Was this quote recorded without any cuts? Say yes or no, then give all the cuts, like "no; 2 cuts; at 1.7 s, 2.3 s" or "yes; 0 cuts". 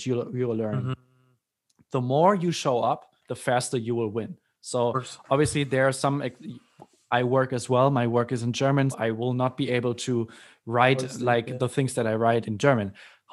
no; 3 cuts; at 3.2 s, 8.9 s, 12.4 s